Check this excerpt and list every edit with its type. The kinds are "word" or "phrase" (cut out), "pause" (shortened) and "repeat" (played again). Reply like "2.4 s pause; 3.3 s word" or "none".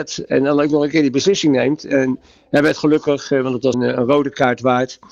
3.7 s word